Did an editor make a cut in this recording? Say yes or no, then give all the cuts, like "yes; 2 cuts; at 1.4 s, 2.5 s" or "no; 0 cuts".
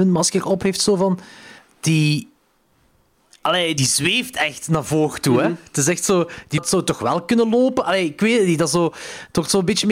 yes; 3 cuts; at 1.6 s, 3.8 s, 6.6 s